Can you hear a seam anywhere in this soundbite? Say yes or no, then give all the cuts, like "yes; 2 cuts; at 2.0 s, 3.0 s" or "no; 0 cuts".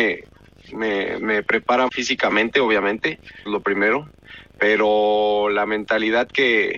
yes; 3 cuts; at 1.2 s, 1.9 s, 3.5 s